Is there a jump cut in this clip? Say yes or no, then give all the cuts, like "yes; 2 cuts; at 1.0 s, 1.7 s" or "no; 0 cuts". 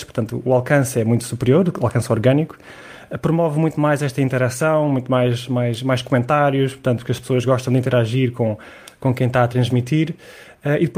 no; 0 cuts